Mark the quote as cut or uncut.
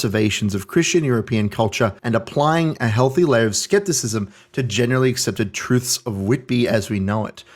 cut